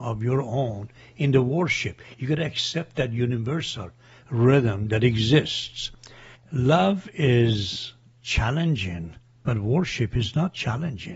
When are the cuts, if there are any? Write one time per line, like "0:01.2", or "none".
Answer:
none